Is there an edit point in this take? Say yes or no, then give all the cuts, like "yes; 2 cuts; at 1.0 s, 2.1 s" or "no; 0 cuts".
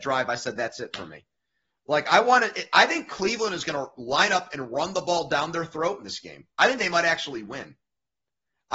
no; 0 cuts